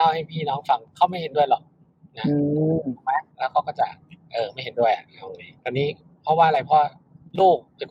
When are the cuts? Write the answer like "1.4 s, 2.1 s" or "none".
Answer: 3.3 s, 5.6 s